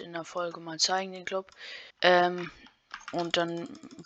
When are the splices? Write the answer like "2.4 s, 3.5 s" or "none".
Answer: 1.9 s